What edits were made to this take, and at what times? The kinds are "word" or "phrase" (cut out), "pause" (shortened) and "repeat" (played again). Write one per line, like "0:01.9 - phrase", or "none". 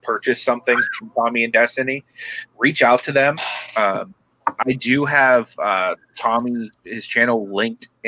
0:06.7 - pause